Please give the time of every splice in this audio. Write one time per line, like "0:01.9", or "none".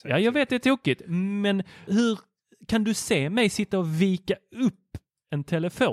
0:01.9